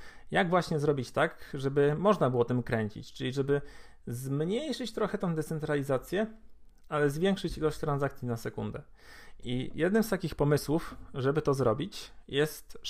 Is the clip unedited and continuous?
yes; 0 cuts

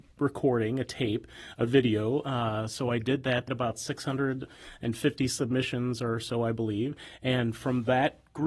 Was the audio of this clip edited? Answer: yes; 1 cut; at 3.5 s

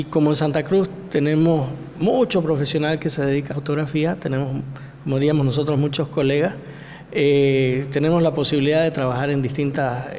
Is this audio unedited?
no; 1 cut; at 3.5 s

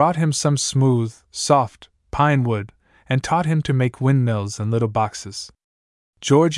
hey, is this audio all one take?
yes; 0 cuts

